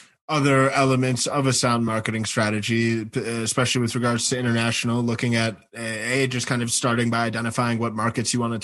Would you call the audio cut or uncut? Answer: uncut